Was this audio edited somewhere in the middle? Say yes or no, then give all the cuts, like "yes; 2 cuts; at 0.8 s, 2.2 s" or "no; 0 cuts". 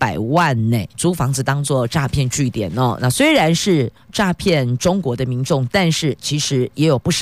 yes; 1 cut; at 0.9 s